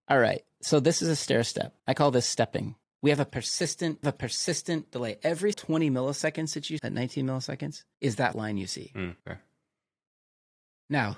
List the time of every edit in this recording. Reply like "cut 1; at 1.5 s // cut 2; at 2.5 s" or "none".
cut 1; at 1.8 s // cut 2; at 2.8 s // cut 3; at 4.0 s // cut 4; at 5.5 s // cut 5; at 6.8 s // cut 6; at 7.9 s // cut 7; at 8.3 s // cut 8; at 9.2 s